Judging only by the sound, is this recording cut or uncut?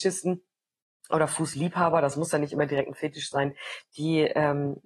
uncut